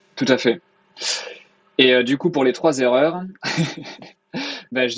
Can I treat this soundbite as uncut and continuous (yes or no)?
yes